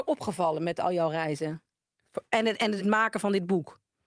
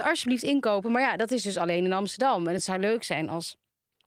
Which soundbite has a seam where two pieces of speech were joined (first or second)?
first